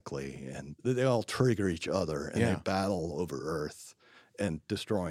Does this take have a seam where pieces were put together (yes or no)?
no